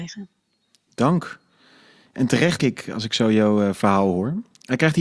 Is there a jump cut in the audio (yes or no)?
yes